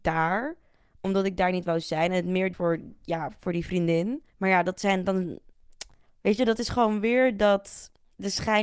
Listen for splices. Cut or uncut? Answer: cut